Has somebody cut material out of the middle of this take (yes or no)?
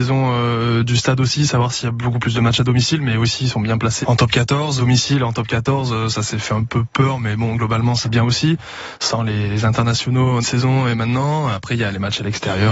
yes